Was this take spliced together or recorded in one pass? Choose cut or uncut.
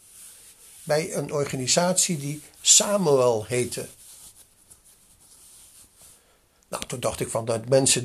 uncut